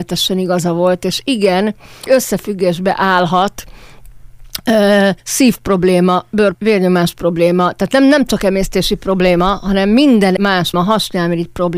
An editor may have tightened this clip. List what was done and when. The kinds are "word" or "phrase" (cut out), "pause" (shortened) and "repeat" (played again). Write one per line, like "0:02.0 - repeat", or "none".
0:02.1 - word
0:05.2 - pause
0:06.5 - word
0:10.4 - word
0:10.7 - word